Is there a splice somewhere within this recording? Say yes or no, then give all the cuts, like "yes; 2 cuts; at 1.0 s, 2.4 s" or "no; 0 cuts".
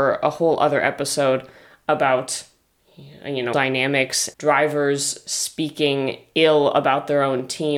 yes; 2 cuts; at 3.5 s, 4.3 s